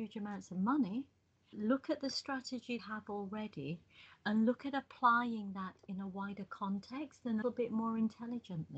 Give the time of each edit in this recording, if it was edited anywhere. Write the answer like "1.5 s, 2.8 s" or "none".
1.5 s, 2.8 s, 7.4 s